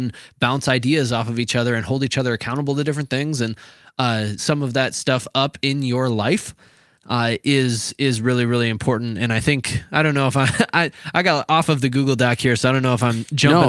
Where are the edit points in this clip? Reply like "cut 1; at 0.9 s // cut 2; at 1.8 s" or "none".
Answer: cut 1; at 4.4 s